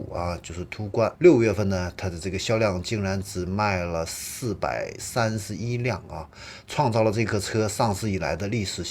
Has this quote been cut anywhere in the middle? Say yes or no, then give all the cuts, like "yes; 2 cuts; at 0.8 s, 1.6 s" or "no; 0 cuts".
yes; 1 cut; at 1.1 s